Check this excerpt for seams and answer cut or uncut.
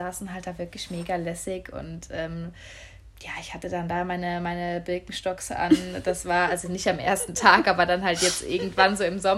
uncut